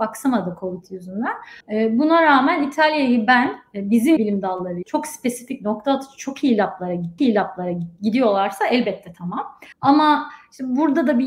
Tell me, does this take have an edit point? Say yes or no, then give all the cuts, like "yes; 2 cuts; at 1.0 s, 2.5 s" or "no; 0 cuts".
yes; 5 cuts; at 1.6 s, 4.2 s, 4.8 s, 7.2 s, 9.7 s